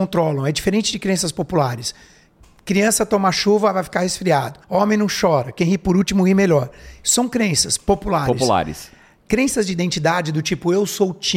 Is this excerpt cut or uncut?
cut